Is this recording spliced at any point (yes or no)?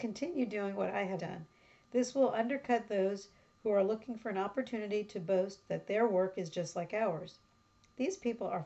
yes